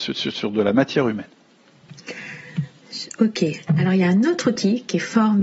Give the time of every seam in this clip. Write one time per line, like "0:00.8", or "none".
none